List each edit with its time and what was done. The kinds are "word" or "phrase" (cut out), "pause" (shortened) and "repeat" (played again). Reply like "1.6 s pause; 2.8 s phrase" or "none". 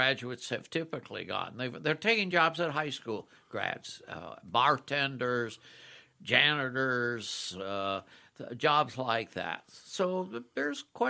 none